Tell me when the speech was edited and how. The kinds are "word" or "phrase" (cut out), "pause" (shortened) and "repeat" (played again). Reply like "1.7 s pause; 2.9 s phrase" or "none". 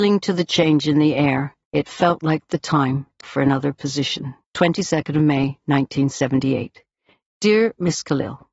1.6 s pause; 3.2 s word; 4.4 s pause